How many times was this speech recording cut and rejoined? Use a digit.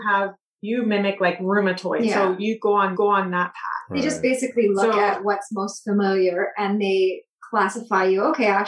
1